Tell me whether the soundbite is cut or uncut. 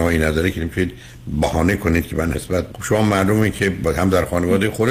cut